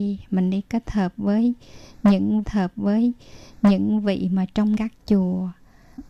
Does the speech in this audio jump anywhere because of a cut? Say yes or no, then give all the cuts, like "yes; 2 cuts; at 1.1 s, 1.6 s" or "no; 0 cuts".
yes; 2 cuts; at 2.4 s, 4.8 s